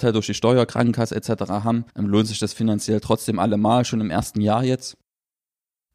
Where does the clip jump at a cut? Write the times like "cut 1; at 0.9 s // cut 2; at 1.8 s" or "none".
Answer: cut 1; at 1.9 s

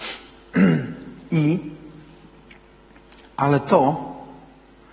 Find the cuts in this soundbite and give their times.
none

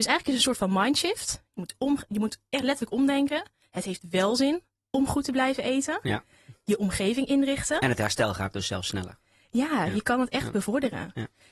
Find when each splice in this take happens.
none

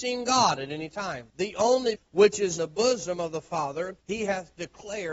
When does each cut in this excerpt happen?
cut 1; at 1.3 s // cut 2; at 2.0 s // cut 3; at 2.6 s // cut 4; at 4.0 s

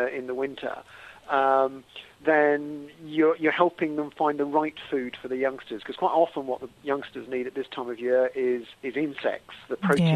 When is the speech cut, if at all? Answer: none

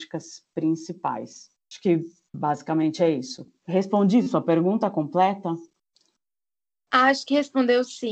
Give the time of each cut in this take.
none

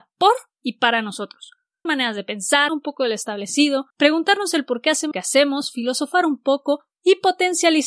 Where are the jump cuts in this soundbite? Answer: cut 1; at 1.9 s // cut 2; at 2.7 s // cut 3; at 3.9 s // cut 4; at 5.1 s

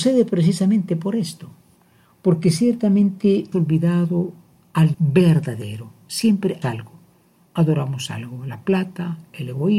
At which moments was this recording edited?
cut 1; at 3.5 s // cut 2; at 4.9 s // cut 3; at 6.6 s

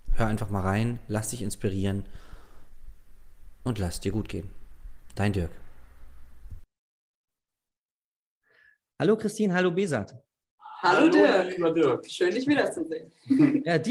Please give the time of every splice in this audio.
none

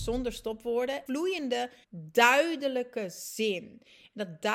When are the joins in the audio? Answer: cut 1; at 1.1 s // cut 2; at 1.8 s

